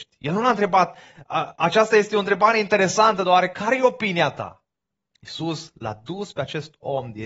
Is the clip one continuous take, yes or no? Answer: yes